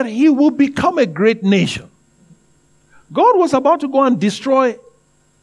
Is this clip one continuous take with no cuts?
yes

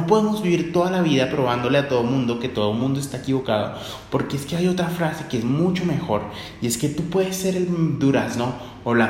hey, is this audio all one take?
yes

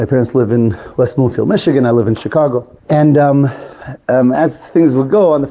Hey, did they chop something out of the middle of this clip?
yes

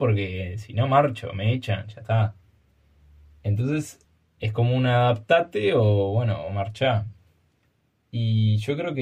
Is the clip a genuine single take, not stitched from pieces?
yes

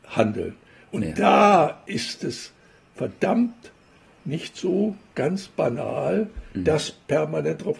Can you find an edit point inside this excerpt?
no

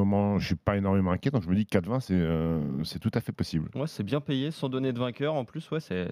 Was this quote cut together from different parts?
no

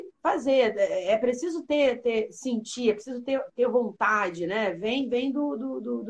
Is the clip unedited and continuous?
yes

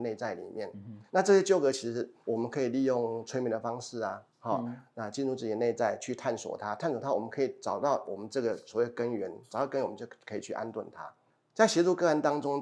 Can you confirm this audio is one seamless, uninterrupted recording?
no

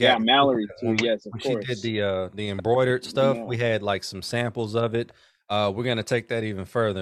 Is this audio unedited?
yes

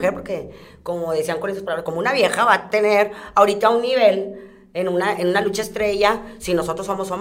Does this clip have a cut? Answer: no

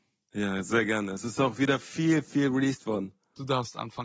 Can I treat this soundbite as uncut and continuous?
yes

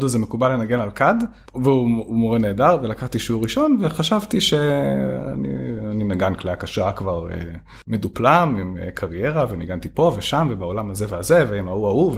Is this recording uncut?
no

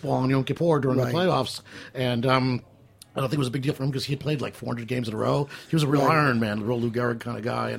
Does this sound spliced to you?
no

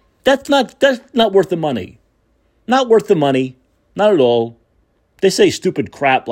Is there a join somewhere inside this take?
no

